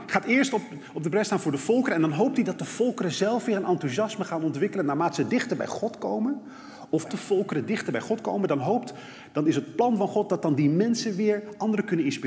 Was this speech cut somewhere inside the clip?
yes; 1 cut; at 7.1 s

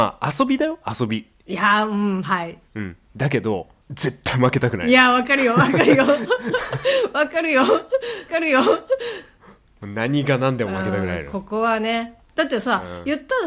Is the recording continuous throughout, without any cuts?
no; 4 cuts; at 2.7 s, 3.8 s, 8.3 s, 12.3 s

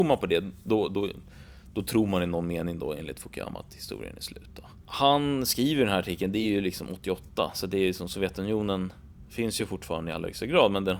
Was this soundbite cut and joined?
no; 0 cuts

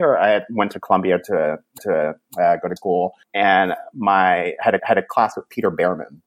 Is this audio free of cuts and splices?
no; 4 cuts; at 1.8 s, 2.8 s, 3.2 s, 4.8 s

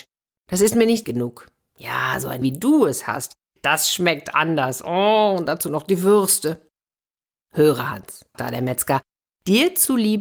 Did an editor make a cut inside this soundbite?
yes; 3 cuts; at 1.0 s, 2.4 s, 8.3 s

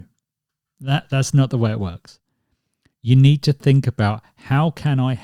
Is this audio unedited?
yes; 0 cuts

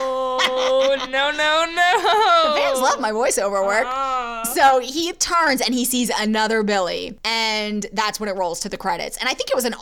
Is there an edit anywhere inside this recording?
no; 0 cuts

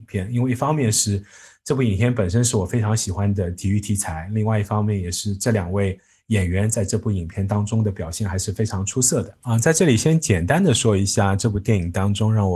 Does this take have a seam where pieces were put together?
no; 0 cuts

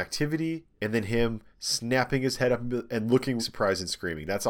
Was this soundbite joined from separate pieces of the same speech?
yes; 1 cut; at 3.4 s

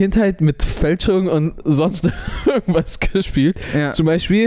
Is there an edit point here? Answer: no; 0 cuts

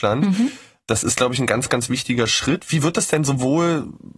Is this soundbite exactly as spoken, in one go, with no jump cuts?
yes; 0 cuts

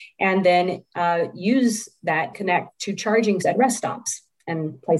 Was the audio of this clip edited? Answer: yes; 2 cuts; at 2.3 s, 3.4 s

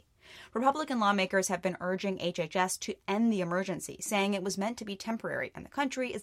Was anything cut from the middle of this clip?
no; 0 cuts

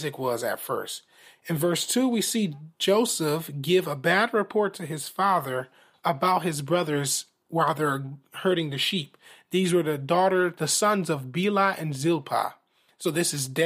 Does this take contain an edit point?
no; 0 cuts

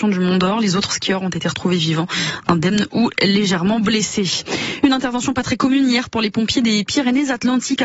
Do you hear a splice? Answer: no; 0 cuts

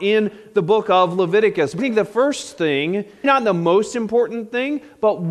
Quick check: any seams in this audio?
yes; 2 cuts; at 1.8 s, 3.2 s

